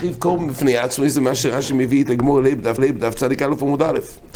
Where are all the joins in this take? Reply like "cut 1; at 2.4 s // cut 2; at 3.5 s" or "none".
cut 1; at 2.8 s